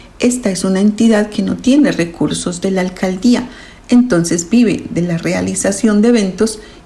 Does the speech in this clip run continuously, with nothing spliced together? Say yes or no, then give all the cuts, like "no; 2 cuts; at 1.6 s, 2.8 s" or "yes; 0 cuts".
yes; 0 cuts